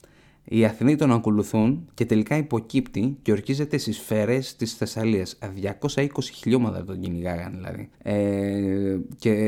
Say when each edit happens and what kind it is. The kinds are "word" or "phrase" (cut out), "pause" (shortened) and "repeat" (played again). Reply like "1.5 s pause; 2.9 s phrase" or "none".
7.9 s pause